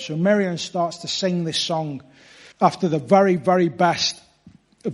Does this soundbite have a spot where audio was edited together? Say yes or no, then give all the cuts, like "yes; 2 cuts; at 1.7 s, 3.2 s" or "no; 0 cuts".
yes; 1 cut; at 2.5 s